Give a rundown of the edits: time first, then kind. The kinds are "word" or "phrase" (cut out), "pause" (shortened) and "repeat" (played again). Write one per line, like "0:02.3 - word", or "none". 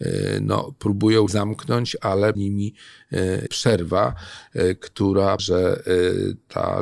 0:01.3 - word
0:02.3 - word
0:03.5 - word
0:05.4 - word